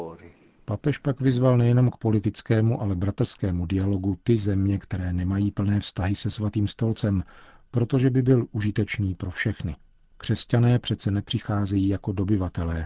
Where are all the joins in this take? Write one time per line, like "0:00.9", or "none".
none